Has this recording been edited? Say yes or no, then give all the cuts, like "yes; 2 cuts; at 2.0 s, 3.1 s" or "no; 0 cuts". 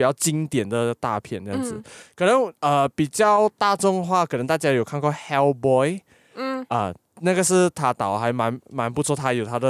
no; 0 cuts